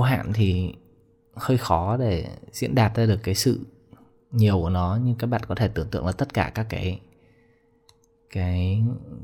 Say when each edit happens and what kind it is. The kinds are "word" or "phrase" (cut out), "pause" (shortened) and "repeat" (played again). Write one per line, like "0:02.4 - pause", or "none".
none